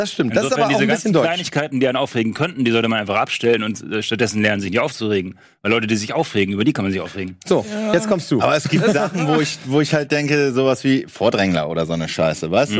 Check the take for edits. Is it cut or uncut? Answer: uncut